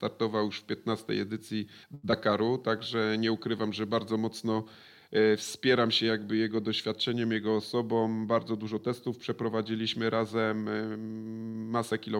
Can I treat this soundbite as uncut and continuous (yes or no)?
no